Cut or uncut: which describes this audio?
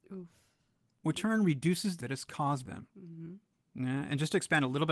cut